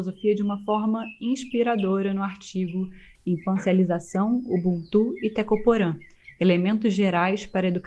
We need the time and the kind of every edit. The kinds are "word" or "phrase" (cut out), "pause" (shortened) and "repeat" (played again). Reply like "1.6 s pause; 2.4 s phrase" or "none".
none